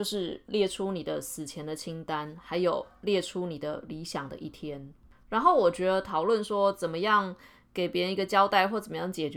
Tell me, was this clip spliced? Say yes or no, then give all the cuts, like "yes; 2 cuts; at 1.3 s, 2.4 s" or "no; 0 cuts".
no; 0 cuts